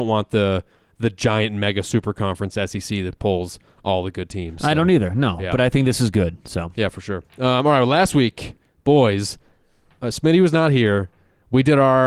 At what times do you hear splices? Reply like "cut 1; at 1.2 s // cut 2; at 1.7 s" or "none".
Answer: cut 1; at 7.3 s